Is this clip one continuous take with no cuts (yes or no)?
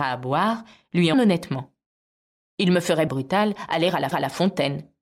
no